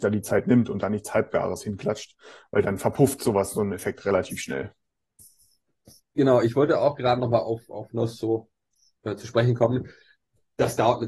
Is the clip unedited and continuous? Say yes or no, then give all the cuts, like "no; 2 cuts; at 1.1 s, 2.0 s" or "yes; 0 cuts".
yes; 0 cuts